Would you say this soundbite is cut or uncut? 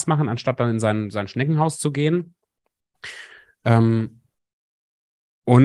uncut